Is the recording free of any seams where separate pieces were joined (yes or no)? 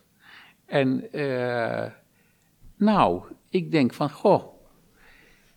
no